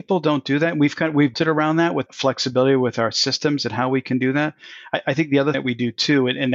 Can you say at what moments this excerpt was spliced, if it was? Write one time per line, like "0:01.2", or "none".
0:01.3
0:02.1
0:05.5